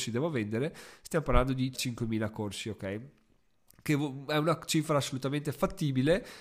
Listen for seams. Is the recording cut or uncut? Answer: cut